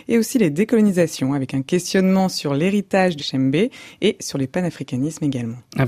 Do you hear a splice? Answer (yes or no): yes